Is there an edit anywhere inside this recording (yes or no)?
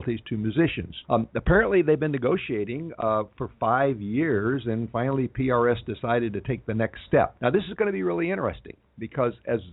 yes